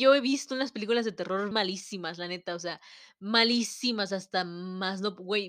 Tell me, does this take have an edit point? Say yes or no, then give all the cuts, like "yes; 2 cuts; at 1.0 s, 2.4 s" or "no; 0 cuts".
yes; 1 cut; at 1.5 s